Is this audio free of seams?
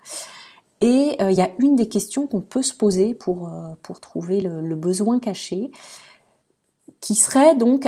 yes; 0 cuts

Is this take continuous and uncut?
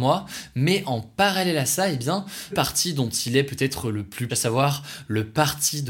no; 2 cuts; at 2.5 s, 4.3 s

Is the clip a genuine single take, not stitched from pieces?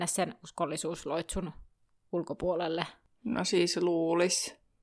yes; 0 cuts

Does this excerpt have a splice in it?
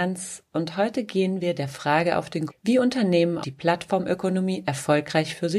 yes; 2 cuts; at 2.5 s, 3.4 s

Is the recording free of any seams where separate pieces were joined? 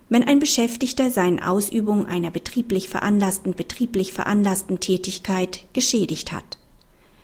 no; 2 cuts; at 1.4 s, 3.5 s

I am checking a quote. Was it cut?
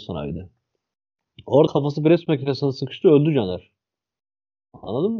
yes; 1 cut; at 1.7 s

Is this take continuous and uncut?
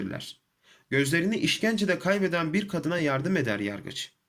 yes; 0 cuts

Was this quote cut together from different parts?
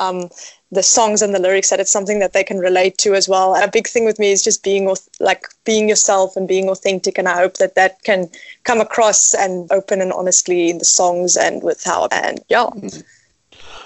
yes; 3 cuts; at 3.6 s, 9.7 s, 12.1 s

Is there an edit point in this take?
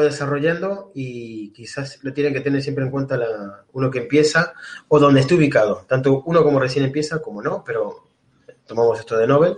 no; 0 cuts

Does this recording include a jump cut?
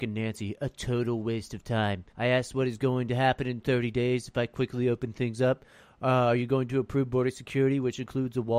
yes; 1 cut; at 2.1 s

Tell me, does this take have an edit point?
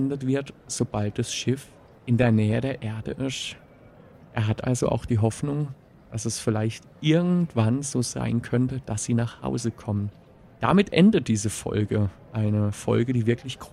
no; 0 cuts

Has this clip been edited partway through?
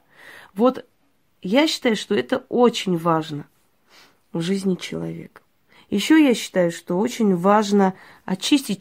no; 0 cuts

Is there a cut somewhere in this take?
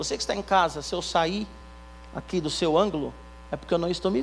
no; 0 cuts

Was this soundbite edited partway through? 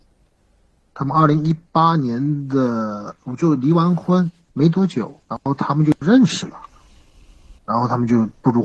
yes; 3 cuts; at 4.5 s, 5.2 s, 7.6 s

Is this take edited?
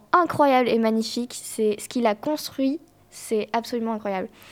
no; 0 cuts

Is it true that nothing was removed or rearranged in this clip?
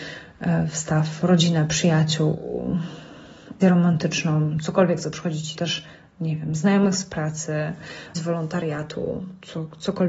no; 3 cuts; at 3.6 s, 5.5 s, 8.1 s

